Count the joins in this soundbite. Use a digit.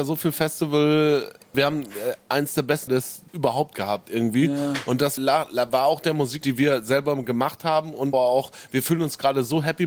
6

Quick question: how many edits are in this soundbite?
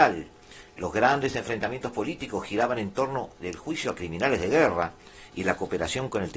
0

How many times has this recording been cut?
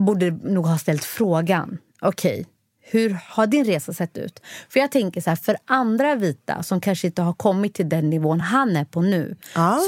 0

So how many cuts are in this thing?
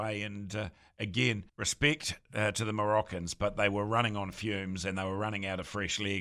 1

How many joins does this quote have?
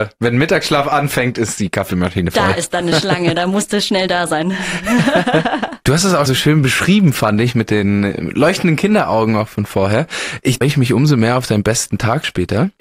2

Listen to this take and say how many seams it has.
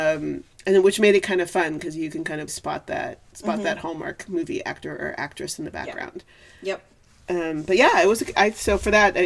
1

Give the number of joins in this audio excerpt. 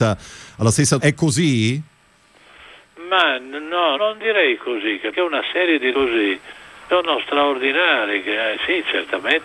5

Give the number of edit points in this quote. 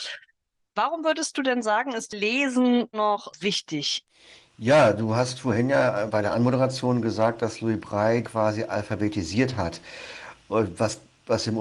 4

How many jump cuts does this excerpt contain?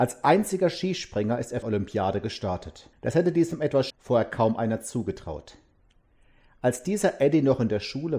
3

